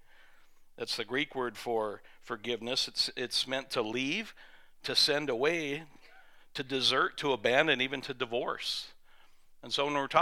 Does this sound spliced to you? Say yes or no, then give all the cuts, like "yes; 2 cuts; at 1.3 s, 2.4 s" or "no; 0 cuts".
no; 0 cuts